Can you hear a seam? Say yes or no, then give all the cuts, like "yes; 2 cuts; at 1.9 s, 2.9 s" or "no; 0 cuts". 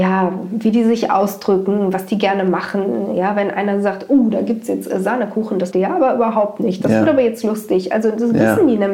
yes; 1 cut; at 5.7 s